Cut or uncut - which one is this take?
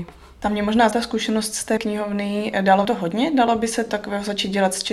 cut